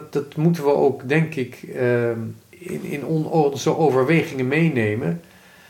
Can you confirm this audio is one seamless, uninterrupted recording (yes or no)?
yes